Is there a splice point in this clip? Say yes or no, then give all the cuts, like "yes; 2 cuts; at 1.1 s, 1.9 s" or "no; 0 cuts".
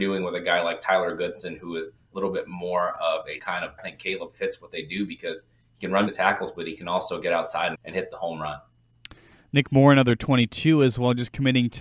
yes; 5 cuts; at 2.1 s, 3.4 s, 3.8 s, 6.1 s, 7.7 s